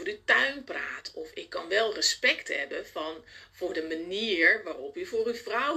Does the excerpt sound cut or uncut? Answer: uncut